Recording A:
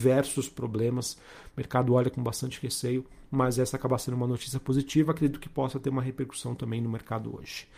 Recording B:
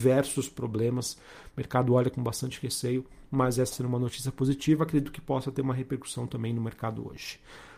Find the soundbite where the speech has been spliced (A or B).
B